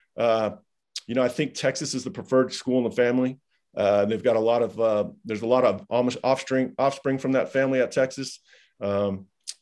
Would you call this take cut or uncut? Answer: uncut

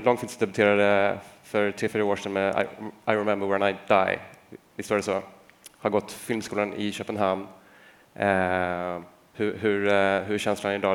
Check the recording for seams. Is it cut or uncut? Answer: uncut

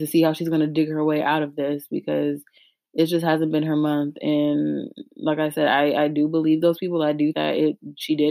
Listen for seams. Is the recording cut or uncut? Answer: cut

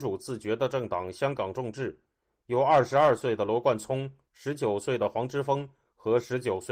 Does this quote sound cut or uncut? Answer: uncut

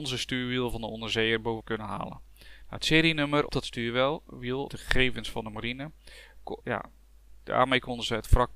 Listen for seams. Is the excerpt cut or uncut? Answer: cut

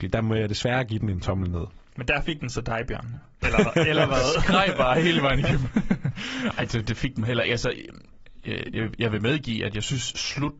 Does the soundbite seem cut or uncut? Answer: uncut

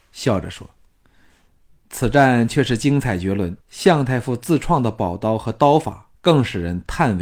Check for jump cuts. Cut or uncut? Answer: cut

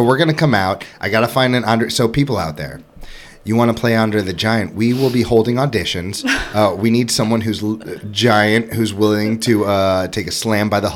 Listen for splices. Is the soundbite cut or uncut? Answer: uncut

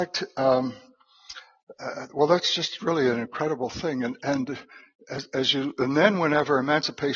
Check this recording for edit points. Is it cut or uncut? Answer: uncut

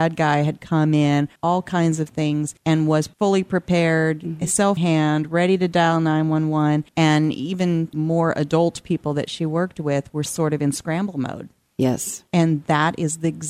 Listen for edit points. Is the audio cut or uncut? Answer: cut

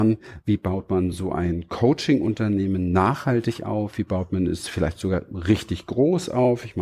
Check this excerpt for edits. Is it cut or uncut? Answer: uncut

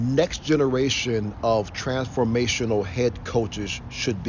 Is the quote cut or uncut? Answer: uncut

